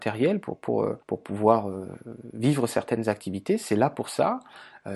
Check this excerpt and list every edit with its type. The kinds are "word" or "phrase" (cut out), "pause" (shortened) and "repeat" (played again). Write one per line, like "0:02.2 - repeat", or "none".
0:01.0 - pause